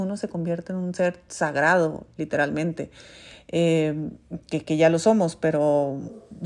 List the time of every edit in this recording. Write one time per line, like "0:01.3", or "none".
none